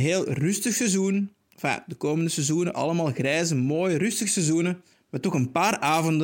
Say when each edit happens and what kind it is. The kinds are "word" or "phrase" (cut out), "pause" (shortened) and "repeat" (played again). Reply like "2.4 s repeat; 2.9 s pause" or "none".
4.9 s pause